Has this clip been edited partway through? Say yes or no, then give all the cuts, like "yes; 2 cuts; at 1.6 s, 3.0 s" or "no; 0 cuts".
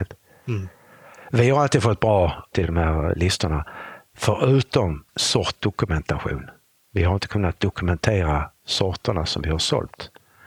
yes; 2 cuts; at 2.5 s, 5.1 s